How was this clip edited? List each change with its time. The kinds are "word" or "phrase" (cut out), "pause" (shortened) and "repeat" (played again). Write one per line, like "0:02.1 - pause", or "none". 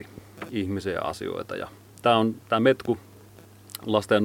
none